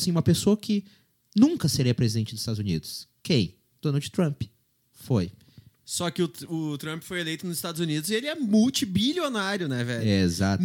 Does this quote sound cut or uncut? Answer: uncut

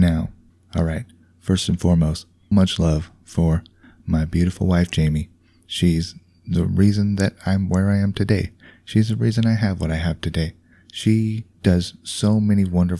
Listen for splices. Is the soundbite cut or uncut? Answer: cut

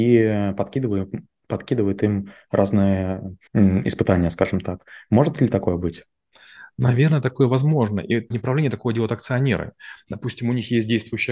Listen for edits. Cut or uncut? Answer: cut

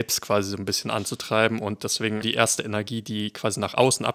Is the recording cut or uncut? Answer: cut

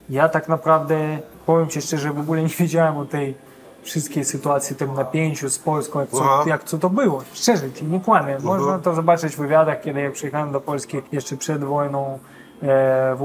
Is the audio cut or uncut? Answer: cut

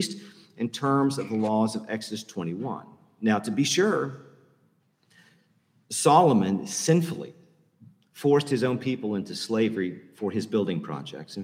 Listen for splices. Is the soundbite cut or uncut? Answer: uncut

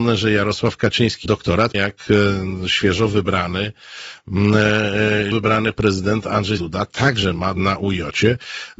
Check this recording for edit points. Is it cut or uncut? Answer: cut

